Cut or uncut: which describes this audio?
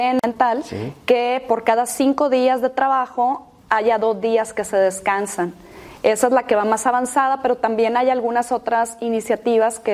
uncut